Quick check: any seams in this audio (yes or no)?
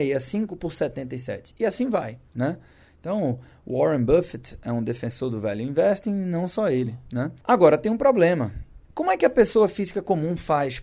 yes